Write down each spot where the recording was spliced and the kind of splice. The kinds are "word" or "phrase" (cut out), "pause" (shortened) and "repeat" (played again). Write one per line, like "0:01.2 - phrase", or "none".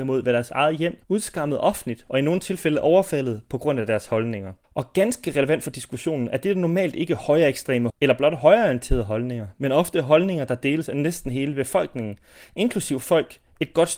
0:01.0 - pause
0:04.6 - pause
0:07.9 - word